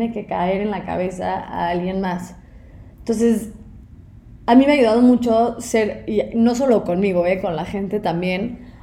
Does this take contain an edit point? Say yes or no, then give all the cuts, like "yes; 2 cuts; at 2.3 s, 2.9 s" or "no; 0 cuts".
yes; 1 cut; at 2.9 s